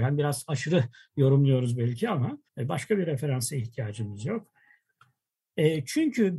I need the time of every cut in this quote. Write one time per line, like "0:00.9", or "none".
0:02.5